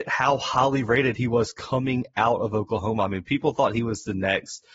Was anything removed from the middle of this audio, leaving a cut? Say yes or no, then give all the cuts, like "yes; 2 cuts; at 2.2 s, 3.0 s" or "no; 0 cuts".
no; 0 cuts